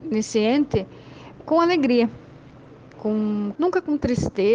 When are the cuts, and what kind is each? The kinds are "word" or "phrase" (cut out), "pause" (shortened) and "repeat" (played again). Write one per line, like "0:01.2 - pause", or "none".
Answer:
0:01.4 - word
0:02.9 - word
0:03.6 - word